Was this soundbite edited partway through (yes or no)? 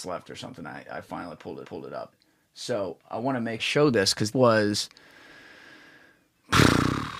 yes